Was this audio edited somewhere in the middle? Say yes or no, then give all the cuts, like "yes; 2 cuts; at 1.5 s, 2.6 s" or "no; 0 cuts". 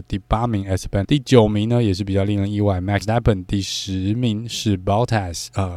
yes; 2 cuts; at 1.0 s, 3.0 s